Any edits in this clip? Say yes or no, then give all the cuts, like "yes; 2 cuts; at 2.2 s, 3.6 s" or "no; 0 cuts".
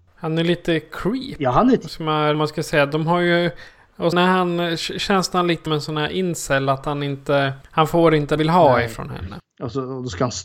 yes; 5 cuts; at 2.3 s, 4.1 s, 5.7 s, 7.6 s, 8.4 s